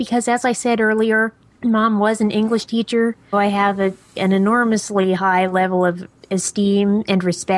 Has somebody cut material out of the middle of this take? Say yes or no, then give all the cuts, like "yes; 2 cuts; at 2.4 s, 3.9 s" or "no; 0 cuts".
yes; 1 cut; at 3.3 s